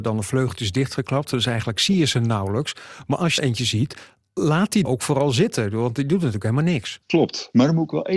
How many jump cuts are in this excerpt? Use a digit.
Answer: 3